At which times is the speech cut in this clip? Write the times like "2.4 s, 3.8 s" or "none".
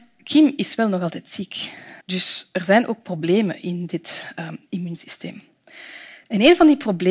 2.0 s